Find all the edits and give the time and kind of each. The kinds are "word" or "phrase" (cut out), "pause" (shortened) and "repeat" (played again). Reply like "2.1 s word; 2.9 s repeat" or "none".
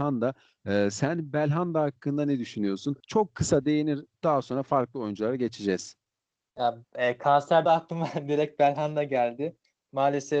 3.0 s pause; 4.1 s word; 7.7 s phrase

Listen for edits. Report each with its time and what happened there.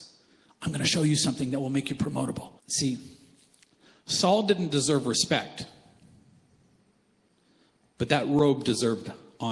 2.6 s pause

